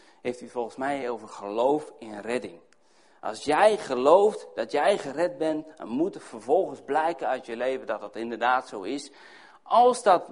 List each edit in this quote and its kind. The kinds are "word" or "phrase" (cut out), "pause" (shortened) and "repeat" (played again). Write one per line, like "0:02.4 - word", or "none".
none